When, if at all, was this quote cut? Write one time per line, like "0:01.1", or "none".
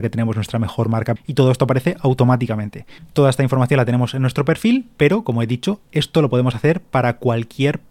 0:01.2